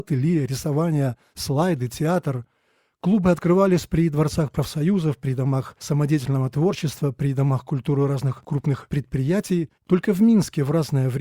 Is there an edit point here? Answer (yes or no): yes